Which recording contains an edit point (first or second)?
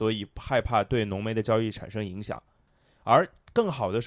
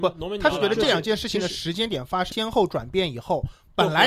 second